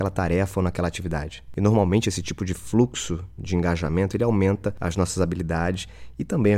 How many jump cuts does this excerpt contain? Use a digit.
0